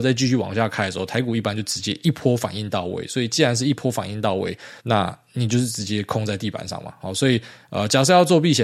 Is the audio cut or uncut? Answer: cut